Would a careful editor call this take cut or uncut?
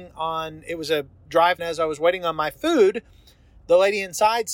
cut